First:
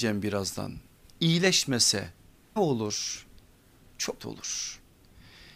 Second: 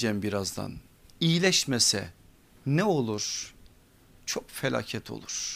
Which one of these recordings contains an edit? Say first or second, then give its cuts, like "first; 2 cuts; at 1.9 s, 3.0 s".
first; 2 cuts; at 2.6 s, 4.2 s